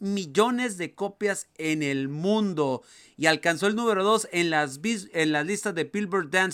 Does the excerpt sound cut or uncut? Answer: uncut